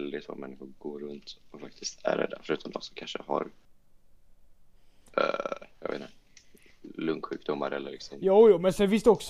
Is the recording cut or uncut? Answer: uncut